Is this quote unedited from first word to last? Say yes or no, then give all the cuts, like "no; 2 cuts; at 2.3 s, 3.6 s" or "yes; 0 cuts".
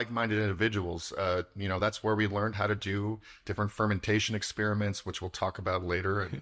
yes; 0 cuts